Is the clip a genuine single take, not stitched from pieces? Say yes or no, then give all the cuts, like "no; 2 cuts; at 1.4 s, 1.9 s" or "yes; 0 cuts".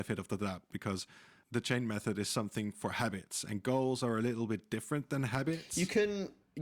yes; 0 cuts